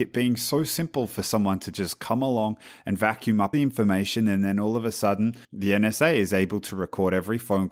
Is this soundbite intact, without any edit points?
no; 2 cuts; at 3.5 s, 5.4 s

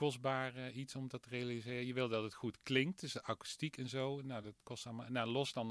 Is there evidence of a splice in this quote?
no; 0 cuts

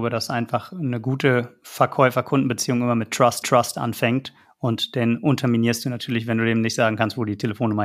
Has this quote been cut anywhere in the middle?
yes; 1 cut; at 3.4 s

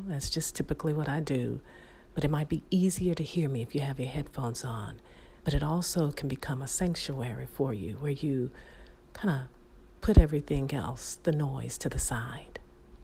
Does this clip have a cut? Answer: yes; 1 cut; at 5.4 s

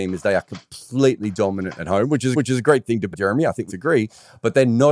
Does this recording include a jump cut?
yes; 3 cuts; at 2.3 s, 3.1 s, 3.7 s

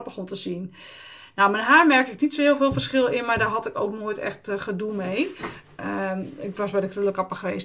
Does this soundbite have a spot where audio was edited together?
no; 0 cuts

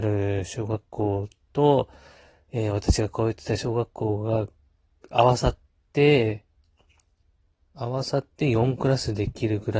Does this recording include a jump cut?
no; 0 cuts

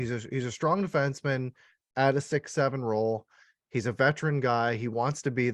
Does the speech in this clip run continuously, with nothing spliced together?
yes; 0 cuts

